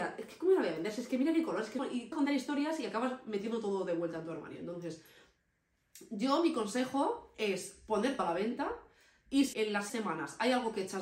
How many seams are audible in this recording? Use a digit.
5